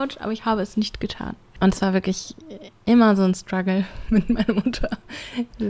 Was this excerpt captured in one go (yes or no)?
yes